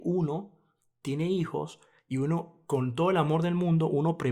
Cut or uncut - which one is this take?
uncut